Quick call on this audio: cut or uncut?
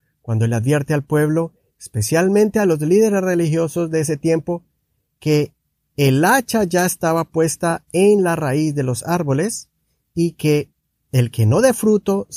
uncut